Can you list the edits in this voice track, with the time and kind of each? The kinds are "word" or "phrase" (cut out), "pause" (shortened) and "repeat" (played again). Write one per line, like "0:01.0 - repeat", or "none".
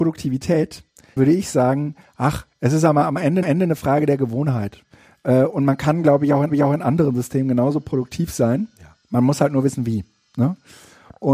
0:01.2 - word
0:03.4 - repeat
0:06.5 - repeat
0:09.0 - pause